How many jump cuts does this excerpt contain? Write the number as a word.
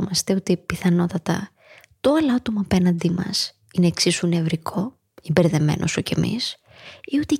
zero